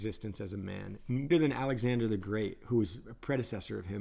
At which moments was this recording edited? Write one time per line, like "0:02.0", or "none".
0:01.3